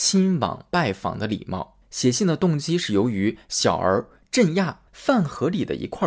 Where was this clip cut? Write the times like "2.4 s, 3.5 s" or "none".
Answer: 1.8 s, 4.9 s